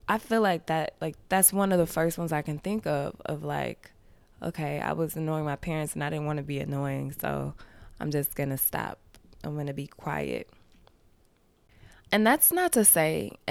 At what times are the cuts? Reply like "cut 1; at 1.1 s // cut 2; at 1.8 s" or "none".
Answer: none